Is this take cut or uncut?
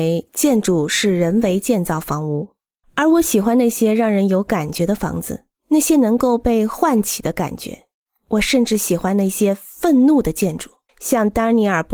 cut